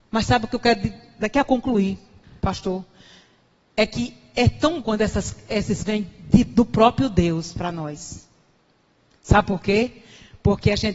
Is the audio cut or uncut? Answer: cut